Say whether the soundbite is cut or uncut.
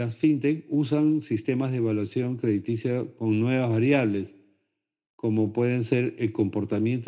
uncut